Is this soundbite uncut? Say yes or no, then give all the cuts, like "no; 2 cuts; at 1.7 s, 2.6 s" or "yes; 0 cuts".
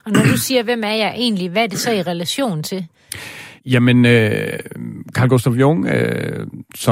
no; 1 cut; at 3.6 s